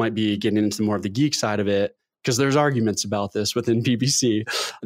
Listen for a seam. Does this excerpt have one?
no; 0 cuts

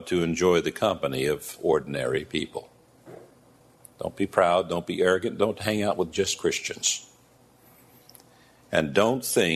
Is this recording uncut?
yes; 0 cuts

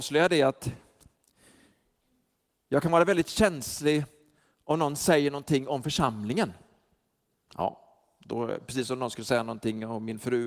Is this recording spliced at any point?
no; 0 cuts

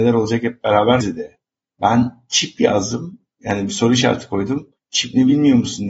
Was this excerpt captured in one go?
no; 3 cuts; at 1.0 s, 1.5 s, 4.8 s

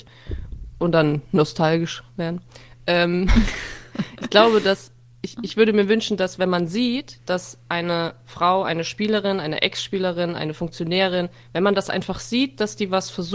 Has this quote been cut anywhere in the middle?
no; 0 cuts

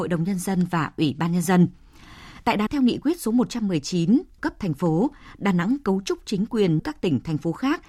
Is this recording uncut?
no; 3 cuts; at 2.7 s, 4.4 s, 6.8 s

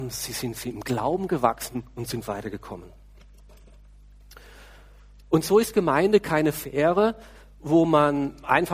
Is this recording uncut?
yes; 0 cuts

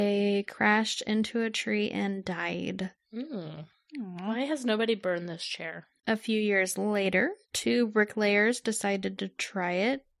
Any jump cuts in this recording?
no; 0 cuts

